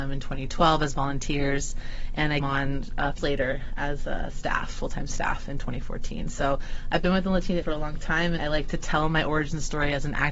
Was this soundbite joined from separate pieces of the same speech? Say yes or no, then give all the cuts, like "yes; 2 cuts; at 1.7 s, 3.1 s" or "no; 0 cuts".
yes; 4 cuts; at 2.4 s, 3.2 s, 7.6 s, 8.4 s